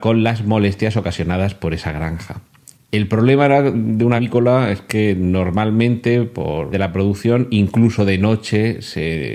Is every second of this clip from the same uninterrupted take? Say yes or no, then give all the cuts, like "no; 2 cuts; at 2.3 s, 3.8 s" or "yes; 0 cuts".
no; 3 cuts; at 2.7 s, 4.2 s, 6.7 s